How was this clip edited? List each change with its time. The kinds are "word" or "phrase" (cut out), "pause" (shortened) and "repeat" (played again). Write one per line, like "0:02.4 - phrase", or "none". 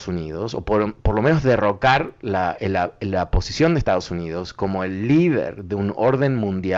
none